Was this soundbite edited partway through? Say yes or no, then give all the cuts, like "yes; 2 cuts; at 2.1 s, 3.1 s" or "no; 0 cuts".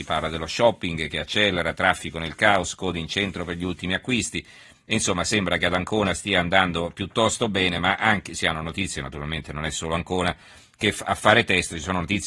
no; 0 cuts